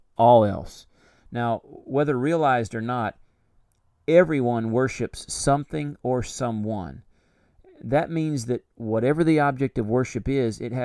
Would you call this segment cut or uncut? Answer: uncut